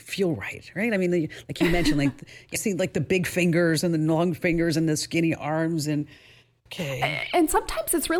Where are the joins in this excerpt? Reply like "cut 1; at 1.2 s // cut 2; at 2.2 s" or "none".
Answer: cut 1; at 2.6 s // cut 2; at 6.7 s

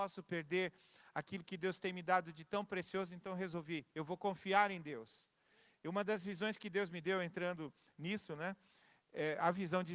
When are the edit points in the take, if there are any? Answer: cut 1; at 3.9 s

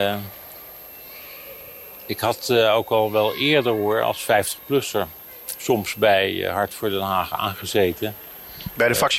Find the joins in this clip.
none

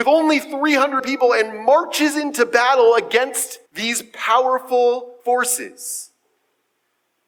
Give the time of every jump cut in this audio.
cut 1; at 1.0 s // cut 2; at 3.7 s // cut 3; at 5.2 s

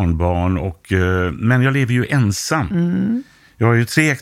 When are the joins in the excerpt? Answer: none

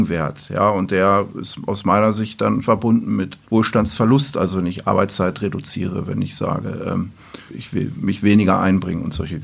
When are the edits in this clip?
cut 1; at 2.6 s // cut 2; at 3.4 s // cut 3; at 7.5 s

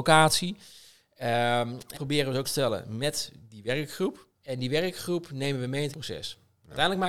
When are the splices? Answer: cut 1; at 1.9 s // cut 2; at 2.4 s // cut 3; at 4.3 s // cut 4; at 5.9 s

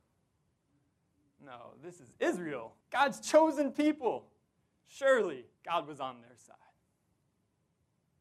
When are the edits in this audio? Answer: cut 1; at 2.8 s // cut 2; at 5.6 s

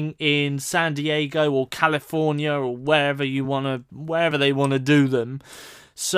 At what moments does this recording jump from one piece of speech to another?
none

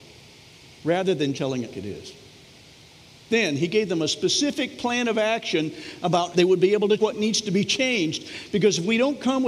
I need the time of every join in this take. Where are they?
cut 1; at 1.3 s // cut 2; at 1.7 s // cut 3; at 6.3 s // cut 4; at 7.0 s

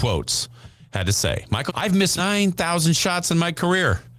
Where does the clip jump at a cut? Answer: cut 1; at 1.7 s // cut 2; at 2.2 s

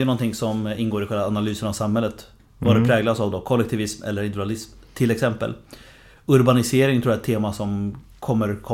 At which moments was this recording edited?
none

